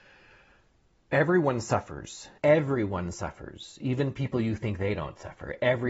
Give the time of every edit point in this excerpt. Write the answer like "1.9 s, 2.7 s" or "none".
2.4 s